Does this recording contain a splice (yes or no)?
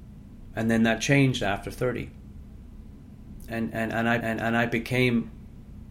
yes